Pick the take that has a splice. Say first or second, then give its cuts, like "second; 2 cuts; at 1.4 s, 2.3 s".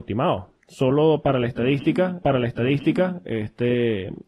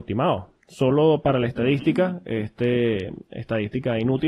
first; 1 cut; at 2.2 s